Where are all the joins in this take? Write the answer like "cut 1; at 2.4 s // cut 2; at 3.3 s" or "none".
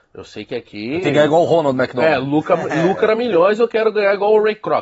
none